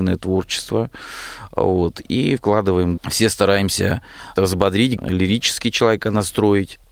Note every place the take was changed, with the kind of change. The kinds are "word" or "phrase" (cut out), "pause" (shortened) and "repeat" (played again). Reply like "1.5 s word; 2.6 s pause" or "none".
2.4 s word; 3.0 s word; 4.4 s word; 5.0 s word